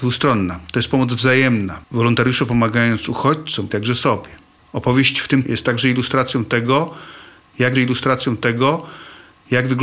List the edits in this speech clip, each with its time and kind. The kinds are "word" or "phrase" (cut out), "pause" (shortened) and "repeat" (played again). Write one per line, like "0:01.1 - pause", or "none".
0:01.8 - pause
0:03.7 - word
0:04.6 - pause
0:05.4 - word
0:07.7 - repeat